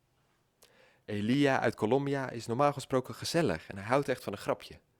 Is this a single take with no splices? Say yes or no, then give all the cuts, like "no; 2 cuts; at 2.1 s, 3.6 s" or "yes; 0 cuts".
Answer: yes; 0 cuts